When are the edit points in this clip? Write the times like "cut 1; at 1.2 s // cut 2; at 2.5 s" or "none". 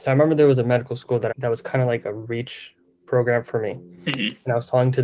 cut 1; at 1.3 s